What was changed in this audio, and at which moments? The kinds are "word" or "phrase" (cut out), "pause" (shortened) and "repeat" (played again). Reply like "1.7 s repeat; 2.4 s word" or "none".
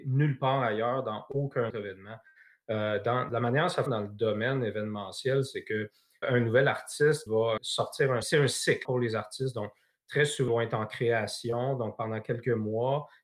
1.7 s word; 3.3 s word; 3.9 s word; 6.2 s word; 7.3 s word; 7.6 s word; 8.2 s word; 8.8 s word; 10.5 s word